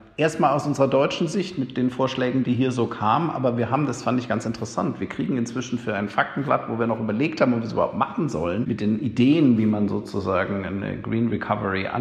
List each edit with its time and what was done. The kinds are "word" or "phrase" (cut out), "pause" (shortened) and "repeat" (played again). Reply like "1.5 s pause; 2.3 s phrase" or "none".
none